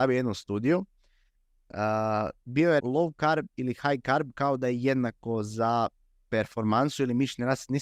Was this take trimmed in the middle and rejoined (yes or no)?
yes